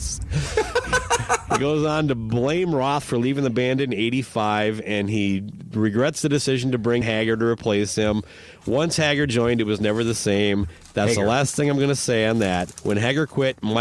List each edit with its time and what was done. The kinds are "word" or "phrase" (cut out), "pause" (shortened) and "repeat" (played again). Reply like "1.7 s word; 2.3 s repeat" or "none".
7.0 s word